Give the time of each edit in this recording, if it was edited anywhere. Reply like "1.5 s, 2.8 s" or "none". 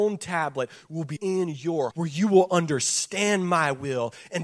1.2 s, 1.9 s